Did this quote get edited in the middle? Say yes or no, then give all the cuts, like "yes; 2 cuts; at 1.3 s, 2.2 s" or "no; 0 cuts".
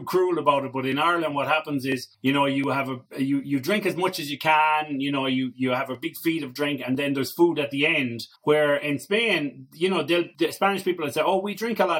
yes; 4 cuts; at 2.1 s, 3.1 s, 8.4 s, 10.3 s